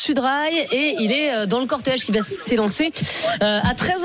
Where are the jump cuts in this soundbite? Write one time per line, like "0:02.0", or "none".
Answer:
none